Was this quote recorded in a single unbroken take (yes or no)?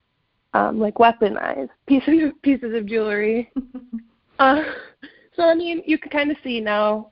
yes